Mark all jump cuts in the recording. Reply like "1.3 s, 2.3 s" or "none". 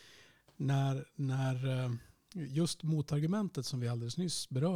none